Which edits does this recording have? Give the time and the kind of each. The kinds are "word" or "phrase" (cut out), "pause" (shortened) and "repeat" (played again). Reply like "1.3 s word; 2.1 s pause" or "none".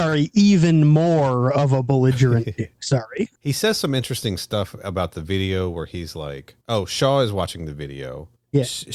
3.3 s pause; 6.6 s pause

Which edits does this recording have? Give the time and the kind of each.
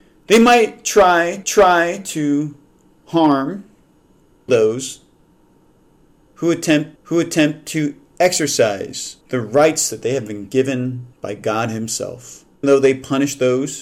1.4 s repeat; 4.5 s phrase; 7.0 s repeat; 9.2 s pause; 11.1 s pause; 12.6 s word

